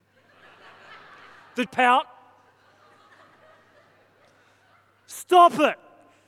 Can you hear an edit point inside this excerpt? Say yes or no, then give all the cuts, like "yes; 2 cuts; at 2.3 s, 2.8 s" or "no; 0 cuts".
yes; 1 cut; at 1.7 s